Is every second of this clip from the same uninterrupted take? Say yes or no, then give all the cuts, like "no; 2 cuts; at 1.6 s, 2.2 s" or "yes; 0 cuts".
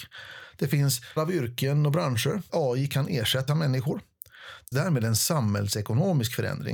no; 4 cuts; at 1.2 s, 2.5 s, 3.5 s, 4.7 s